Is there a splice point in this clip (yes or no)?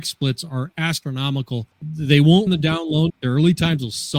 yes